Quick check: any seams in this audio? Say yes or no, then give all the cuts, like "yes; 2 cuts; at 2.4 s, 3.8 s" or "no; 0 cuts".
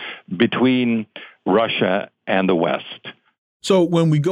no; 0 cuts